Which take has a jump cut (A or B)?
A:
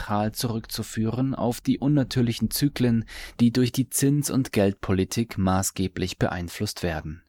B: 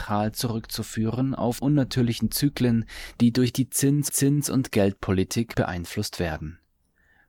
B